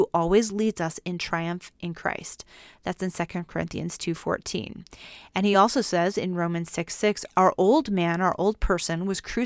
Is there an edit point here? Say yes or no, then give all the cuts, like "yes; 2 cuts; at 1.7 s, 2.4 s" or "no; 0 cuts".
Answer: no; 0 cuts